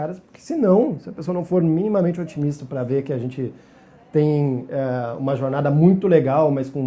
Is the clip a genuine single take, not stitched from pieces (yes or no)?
yes